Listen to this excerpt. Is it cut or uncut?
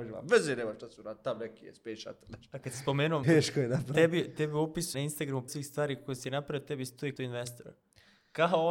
cut